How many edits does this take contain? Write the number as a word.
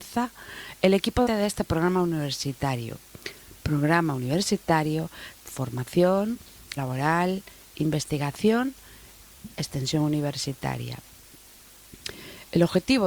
four